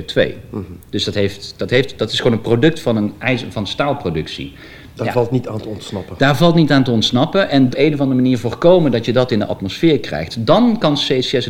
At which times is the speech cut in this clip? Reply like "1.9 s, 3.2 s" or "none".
7.7 s